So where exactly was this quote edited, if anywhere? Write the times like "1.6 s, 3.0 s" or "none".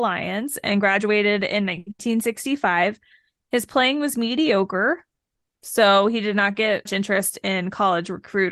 6.9 s